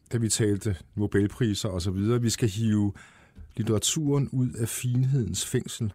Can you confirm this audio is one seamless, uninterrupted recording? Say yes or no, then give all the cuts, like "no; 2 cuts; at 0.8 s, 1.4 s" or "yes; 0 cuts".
no; 1 cut; at 3.5 s